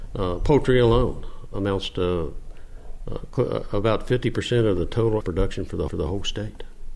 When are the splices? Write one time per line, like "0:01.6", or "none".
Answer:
0:01.5
0:05.2
0:05.9